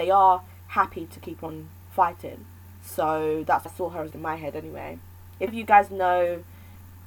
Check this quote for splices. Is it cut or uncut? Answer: cut